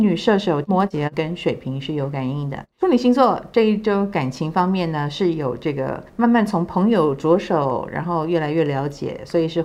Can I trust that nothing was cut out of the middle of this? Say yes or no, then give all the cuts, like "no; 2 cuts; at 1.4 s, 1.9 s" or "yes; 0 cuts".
no; 2 cuts; at 2.7 s, 6.1 s